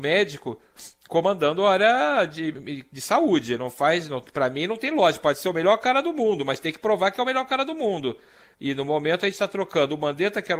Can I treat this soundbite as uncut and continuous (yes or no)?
yes